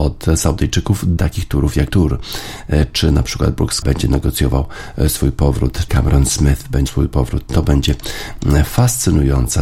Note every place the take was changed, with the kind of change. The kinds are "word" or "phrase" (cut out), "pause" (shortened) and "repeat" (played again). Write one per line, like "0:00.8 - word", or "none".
0:01.2 - word
0:01.9 - word
0:03.8 - word
0:05.9 - word
0:06.9 - word